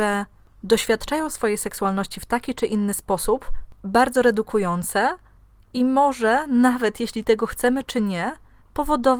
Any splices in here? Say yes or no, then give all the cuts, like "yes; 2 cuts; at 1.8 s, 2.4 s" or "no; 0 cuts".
no; 0 cuts